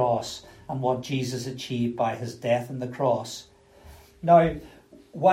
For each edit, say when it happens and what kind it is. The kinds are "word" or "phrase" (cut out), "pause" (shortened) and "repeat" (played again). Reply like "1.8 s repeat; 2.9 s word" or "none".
none